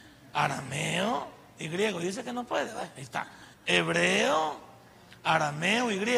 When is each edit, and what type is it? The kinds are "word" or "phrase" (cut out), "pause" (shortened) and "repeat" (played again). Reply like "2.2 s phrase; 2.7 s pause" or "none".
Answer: 3.5 s pause